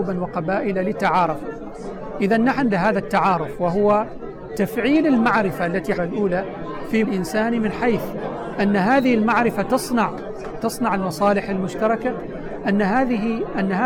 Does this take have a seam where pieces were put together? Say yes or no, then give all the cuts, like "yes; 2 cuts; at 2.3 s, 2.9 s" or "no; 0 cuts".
yes; 4 cuts; at 2.7 s, 6.0 s, 7.0 s, 10.6 s